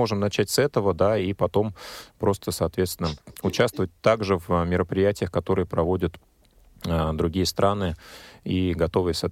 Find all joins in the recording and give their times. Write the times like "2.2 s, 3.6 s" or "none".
none